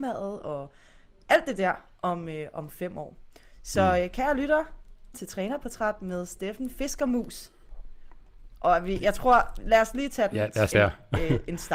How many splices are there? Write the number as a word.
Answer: two